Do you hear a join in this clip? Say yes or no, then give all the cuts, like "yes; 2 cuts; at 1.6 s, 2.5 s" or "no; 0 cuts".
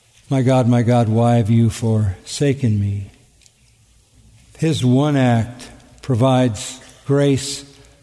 no; 0 cuts